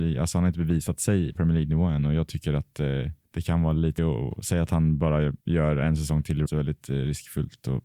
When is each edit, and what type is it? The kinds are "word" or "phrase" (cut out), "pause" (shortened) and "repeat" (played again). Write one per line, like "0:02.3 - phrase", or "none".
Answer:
0:01.3 - word
0:03.2 - pause
0:04.0 - word
0:05.4 - pause
0:06.5 - phrase